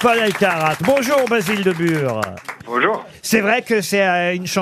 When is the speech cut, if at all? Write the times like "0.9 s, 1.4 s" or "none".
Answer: none